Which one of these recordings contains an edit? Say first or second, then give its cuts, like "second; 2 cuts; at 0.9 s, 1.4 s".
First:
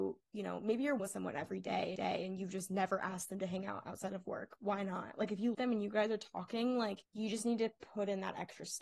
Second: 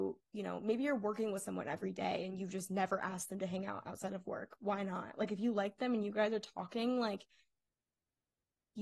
first; 4 cuts; at 1.0 s, 2.0 s, 5.5 s, 7.1 s